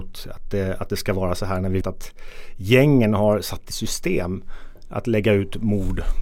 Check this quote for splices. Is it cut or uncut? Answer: cut